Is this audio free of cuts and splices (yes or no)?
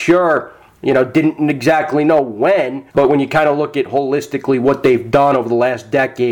no